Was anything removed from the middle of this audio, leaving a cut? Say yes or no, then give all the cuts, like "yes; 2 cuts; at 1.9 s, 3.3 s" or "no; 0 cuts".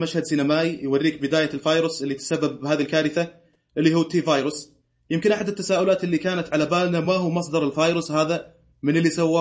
no; 0 cuts